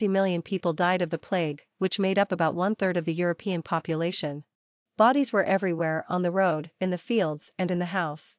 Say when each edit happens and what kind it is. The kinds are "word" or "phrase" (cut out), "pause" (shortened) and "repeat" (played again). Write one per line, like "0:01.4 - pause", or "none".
0:04.8 - pause